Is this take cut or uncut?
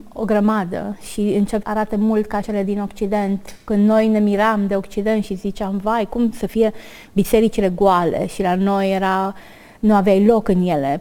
cut